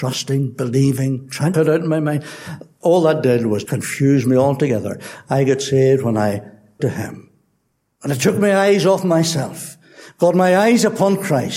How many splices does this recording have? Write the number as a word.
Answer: three